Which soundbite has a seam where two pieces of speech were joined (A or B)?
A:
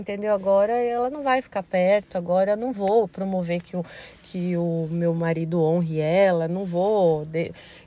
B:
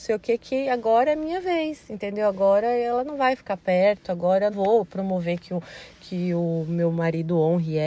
B